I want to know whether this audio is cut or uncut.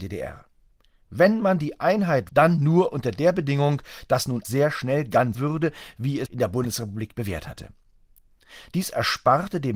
cut